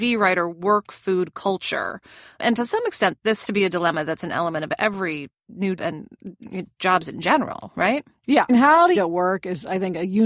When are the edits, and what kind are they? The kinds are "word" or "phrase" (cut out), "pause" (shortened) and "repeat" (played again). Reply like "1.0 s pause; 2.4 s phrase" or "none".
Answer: 3.4 s word; 5.8 s word; 8.5 s word; 9.0 s word